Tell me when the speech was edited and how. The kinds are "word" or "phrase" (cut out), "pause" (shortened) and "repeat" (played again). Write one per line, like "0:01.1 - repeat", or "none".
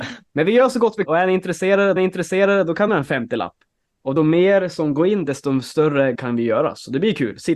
0:01.0 - word
0:02.0 - repeat
0:02.9 - phrase
0:04.2 - word
0:06.1 - word